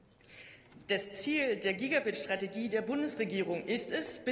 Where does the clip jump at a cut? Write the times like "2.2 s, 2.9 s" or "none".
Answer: none